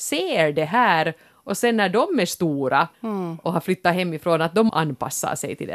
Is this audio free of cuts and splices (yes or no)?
no